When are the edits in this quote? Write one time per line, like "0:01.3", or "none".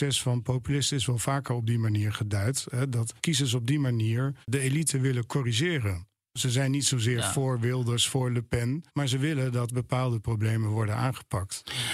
0:03.2
0:04.4
0:08.9